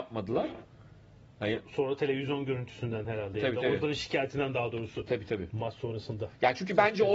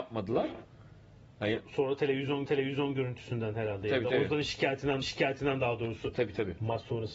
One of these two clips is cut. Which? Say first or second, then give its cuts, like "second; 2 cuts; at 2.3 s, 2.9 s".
second; 2 cuts; at 2.5 s, 5.0 s